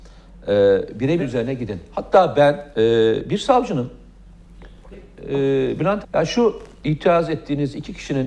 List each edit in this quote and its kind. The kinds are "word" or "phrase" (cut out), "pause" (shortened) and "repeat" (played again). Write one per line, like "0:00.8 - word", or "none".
0:01.2 - word
0:02.7 - pause
0:04.9 - word
0:06.0 - phrase
0:06.8 - word